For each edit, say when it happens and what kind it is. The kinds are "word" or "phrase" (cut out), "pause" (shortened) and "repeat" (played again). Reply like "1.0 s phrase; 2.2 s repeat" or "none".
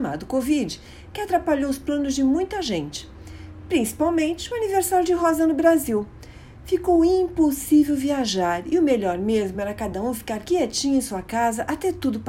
none